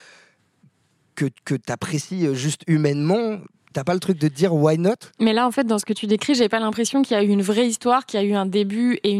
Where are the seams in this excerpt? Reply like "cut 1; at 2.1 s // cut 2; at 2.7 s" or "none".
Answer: cut 1; at 1.4 s